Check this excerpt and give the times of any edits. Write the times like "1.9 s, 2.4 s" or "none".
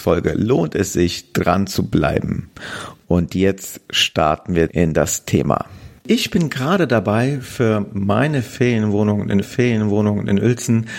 4.7 s, 6.0 s, 9.4 s